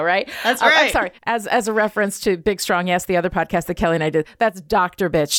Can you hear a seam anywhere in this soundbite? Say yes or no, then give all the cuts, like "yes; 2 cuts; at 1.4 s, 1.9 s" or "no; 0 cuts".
yes; 1 cut; at 1.2 s